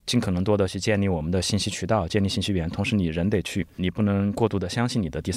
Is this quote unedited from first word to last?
no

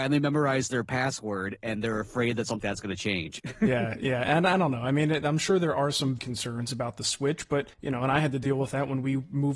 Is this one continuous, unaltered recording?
no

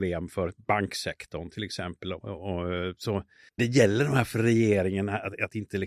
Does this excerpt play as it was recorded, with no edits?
no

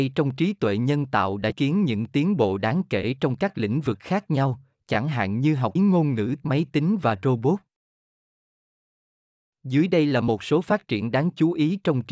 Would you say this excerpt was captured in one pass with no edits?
no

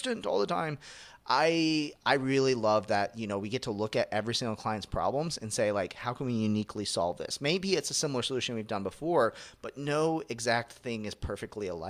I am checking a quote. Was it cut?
no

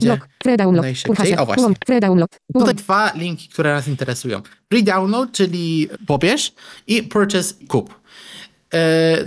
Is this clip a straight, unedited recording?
no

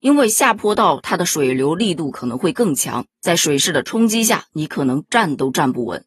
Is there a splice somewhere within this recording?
no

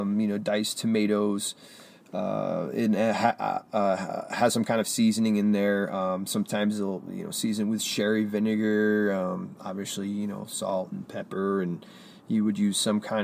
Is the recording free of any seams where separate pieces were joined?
yes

